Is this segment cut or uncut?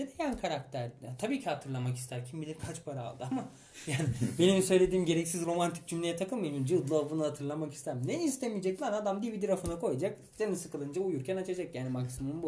uncut